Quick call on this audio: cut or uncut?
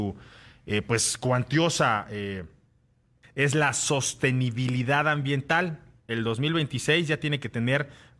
cut